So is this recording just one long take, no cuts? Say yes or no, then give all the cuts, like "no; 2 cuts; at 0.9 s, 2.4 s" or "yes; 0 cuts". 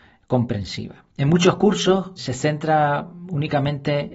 no; 2 cuts; at 1.1 s, 2.2 s